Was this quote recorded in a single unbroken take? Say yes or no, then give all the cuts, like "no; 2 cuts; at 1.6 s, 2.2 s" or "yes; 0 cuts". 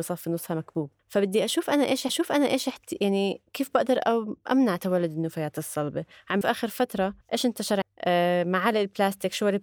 no; 6 cuts; at 1.0 s, 2.1 s, 3.5 s, 6.4 s, 7.2 s, 7.8 s